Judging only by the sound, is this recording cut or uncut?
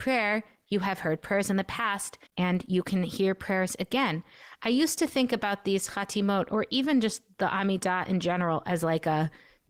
cut